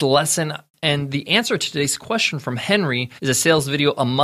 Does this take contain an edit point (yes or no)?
yes